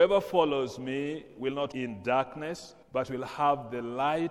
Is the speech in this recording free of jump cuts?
no; 2 cuts; at 1.7 s, 2.8 s

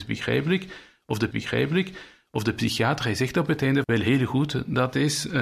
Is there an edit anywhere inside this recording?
yes; 2 cuts; at 1.3 s, 3.8 s

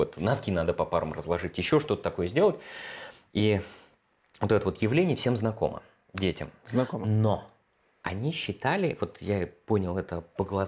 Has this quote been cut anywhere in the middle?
no; 0 cuts

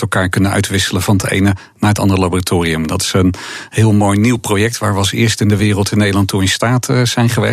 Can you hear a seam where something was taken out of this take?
no; 0 cuts

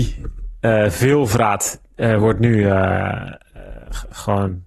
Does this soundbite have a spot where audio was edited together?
no; 0 cuts

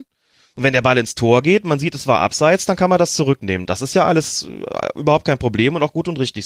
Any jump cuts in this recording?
no; 0 cuts

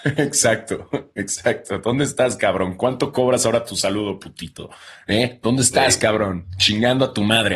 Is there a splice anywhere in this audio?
no; 0 cuts

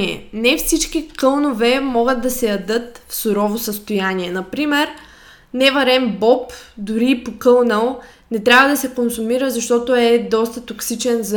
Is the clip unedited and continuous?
yes; 0 cuts

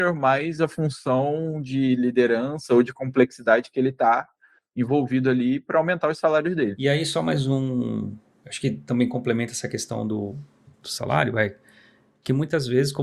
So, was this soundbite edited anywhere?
no; 0 cuts

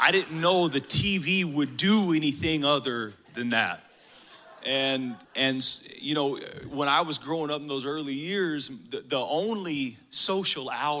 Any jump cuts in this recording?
yes; 1 cut; at 5.2 s

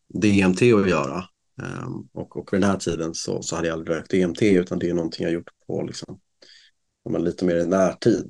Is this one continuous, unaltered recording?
yes; 0 cuts

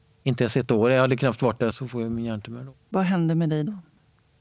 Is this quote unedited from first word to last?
no; 2 cuts; at 1.7 s, 2.8 s

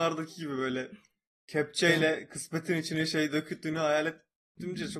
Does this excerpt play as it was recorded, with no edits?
yes; 0 cuts

